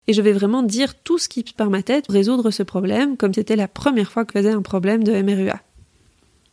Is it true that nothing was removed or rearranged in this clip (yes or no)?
no